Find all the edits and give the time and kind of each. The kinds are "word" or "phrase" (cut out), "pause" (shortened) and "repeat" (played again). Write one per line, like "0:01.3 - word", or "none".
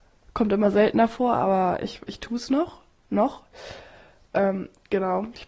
none